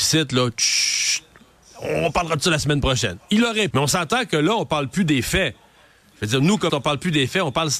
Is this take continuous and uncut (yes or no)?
no